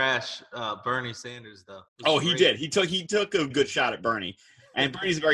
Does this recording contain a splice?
yes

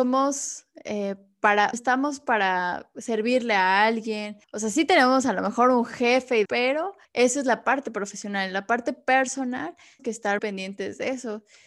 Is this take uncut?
no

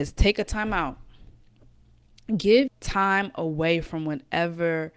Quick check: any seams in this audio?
yes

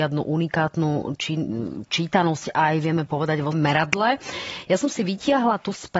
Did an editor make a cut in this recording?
yes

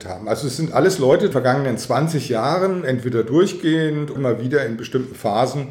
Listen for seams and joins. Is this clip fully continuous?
no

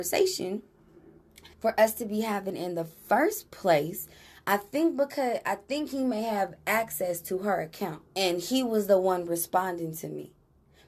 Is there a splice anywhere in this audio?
yes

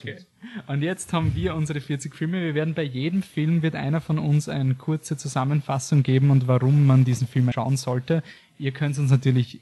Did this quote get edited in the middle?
yes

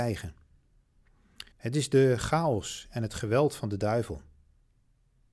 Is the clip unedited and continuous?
no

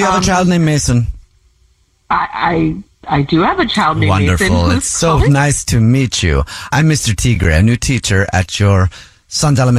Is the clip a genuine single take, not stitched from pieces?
yes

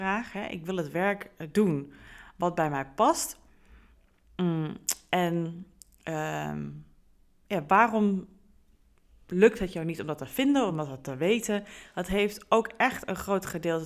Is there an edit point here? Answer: no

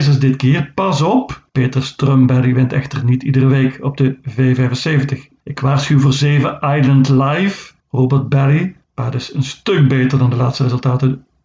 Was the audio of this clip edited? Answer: yes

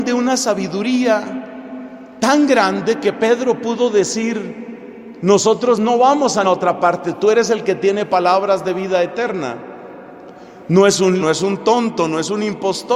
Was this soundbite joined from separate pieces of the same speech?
yes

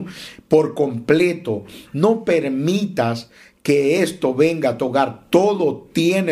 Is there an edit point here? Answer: no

